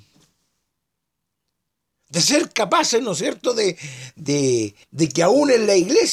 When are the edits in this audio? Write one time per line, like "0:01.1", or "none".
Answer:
0:04.8